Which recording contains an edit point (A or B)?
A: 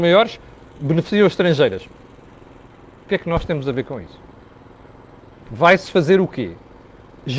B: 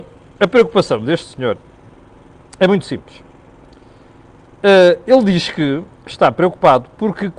B